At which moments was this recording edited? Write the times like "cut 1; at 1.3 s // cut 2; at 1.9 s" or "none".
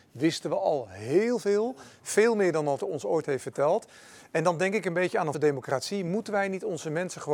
cut 1; at 2.8 s // cut 2; at 5.3 s